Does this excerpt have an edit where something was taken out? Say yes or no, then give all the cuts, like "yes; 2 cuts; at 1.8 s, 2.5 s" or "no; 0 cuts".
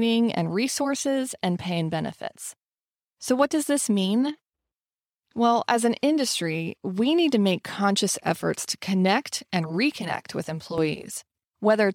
no; 0 cuts